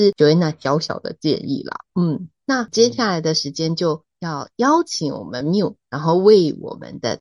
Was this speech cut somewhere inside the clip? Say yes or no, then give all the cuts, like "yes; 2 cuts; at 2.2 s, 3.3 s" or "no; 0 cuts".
no; 0 cuts